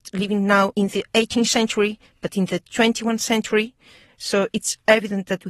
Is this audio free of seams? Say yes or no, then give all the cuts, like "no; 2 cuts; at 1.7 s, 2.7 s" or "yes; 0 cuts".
yes; 0 cuts